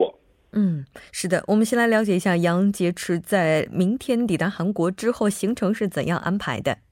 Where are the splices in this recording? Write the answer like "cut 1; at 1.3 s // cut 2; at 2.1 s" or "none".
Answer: cut 1; at 1.1 s